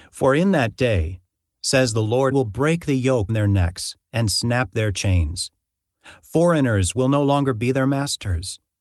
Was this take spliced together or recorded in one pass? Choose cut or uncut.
cut